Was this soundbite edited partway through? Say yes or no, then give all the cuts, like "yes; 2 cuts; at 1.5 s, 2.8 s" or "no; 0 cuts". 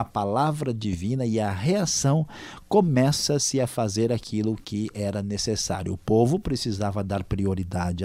no; 0 cuts